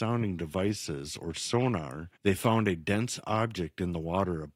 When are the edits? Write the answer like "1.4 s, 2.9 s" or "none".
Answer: 2.2 s